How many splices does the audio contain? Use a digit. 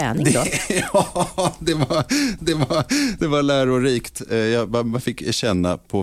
1